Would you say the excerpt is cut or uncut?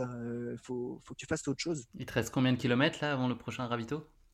cut